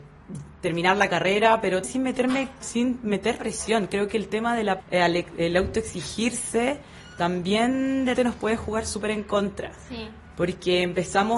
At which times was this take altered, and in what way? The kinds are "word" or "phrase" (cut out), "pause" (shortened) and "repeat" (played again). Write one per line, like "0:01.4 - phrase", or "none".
0:01.8 - word
0:02.6 - word
0:03.4 - word
0:04.8 - word
0:08.1 - word